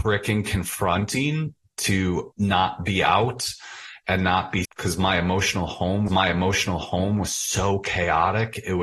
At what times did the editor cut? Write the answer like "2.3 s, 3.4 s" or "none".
2.3 s, 4.6 s, 6.1 s